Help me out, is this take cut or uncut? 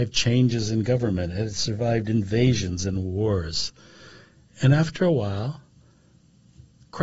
uncut